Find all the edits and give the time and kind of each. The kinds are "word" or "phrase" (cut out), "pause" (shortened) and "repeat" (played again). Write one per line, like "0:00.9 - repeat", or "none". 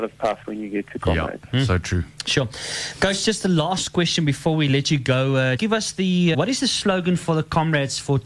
0:05.6 - word
0:06.3 - word

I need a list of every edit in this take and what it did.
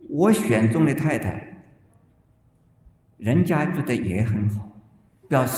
none

